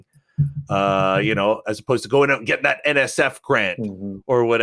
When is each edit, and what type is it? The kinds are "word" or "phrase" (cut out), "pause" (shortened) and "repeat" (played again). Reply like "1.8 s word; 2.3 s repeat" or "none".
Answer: none